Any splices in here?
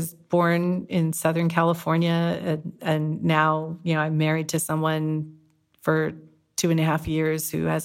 no; 0 cuts

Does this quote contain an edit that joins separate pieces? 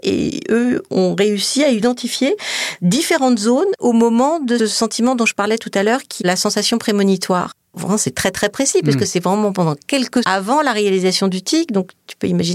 yes; 4 cuts; at 3.8 s, 4.6 s, 6.2 s, 10.2 s

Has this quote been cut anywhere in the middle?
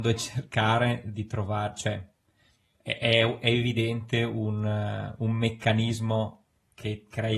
no; 0 cuts

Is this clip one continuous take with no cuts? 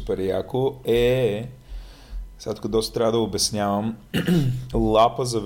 yes; 0 cuts

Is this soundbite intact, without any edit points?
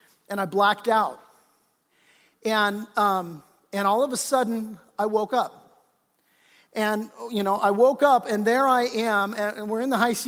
yes; 0 cuts

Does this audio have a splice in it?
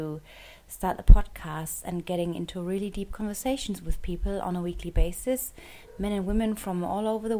no; 0 cuts

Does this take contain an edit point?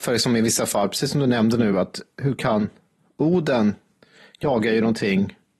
no; 0 cuts

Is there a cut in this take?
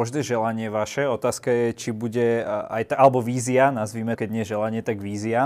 yes; 1 cut; at 4.2 s

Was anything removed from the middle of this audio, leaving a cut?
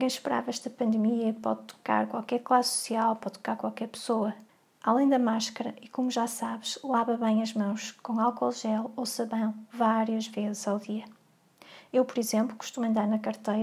yes; 1 cut; at 4.5 s

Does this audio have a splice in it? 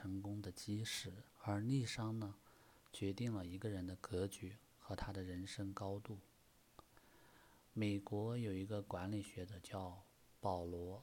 yes; 1 cut; at 1.3 s

